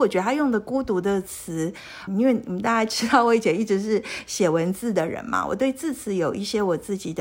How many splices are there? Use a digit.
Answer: 1